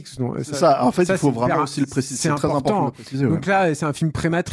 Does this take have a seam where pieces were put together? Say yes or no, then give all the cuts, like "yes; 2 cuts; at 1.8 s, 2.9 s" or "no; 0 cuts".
no; 0 cuts